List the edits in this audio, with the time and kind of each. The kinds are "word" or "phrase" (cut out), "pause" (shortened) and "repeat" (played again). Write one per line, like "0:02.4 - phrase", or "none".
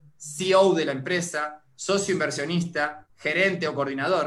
none